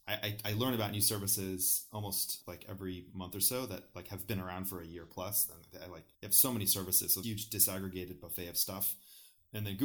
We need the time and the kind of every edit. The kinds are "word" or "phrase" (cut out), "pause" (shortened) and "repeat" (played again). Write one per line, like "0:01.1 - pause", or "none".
0:06.1 - pause
0:07.2 - phrase